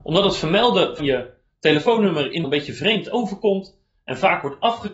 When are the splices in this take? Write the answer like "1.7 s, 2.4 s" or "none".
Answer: 1.0 s, 2.4 s